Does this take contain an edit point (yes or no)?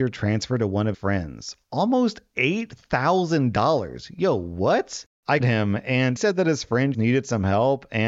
yes